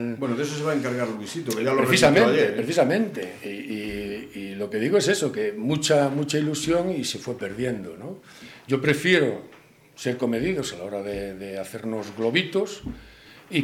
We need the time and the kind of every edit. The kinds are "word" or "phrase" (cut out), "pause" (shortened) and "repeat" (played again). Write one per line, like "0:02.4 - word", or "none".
none